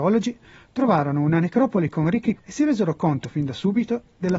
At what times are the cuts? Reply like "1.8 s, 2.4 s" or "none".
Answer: 2.4 s